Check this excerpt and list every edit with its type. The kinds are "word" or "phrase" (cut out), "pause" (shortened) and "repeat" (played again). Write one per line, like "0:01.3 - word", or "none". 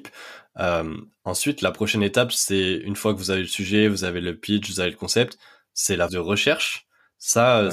0:06.1 - word